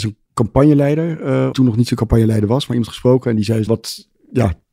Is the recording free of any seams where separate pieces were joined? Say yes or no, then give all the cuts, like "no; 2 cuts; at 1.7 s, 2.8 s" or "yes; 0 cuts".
no; 2 cuts; at 1.5 s, 3.7 s